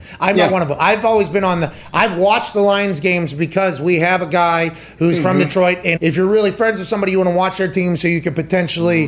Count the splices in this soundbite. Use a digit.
1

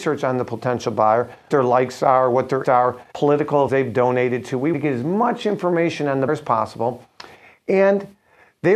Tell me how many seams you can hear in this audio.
6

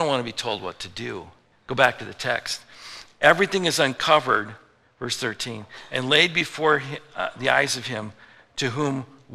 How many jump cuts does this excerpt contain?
1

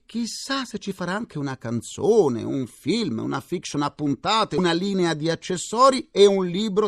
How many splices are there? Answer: 0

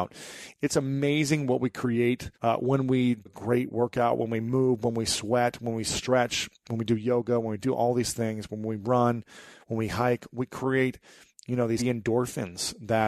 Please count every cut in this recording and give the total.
3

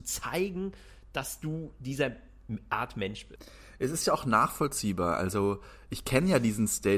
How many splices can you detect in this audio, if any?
0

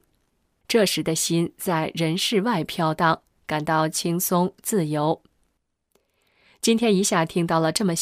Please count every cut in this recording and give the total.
0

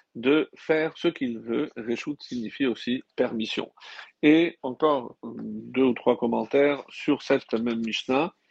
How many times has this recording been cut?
1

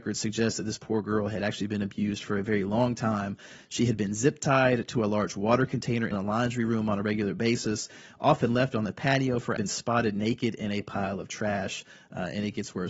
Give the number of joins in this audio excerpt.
2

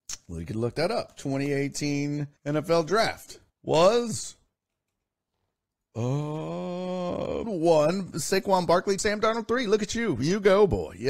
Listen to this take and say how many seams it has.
4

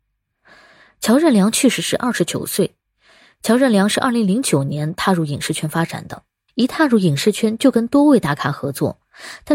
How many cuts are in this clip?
0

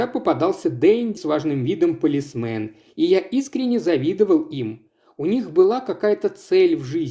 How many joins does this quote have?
1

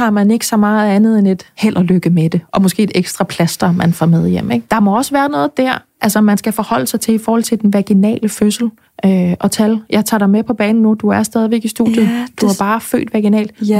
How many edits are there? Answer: 0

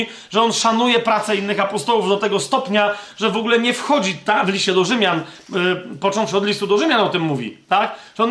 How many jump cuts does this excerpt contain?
0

